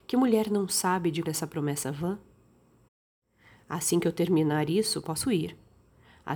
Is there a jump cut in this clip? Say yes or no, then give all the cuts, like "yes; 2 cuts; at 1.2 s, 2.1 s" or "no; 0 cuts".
yes; 1 cut; at 1.2 s